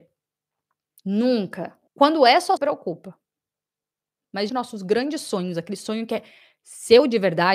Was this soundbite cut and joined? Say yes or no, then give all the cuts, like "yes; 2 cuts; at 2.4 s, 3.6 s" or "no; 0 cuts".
yes; 3 cuts; at 1.9 s, 2.6 s, 4.5 s